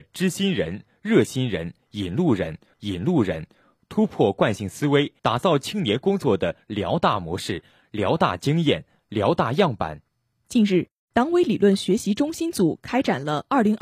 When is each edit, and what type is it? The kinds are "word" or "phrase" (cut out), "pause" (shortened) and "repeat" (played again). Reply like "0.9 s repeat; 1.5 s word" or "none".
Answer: 2.7 s repeat; 5.2 s pause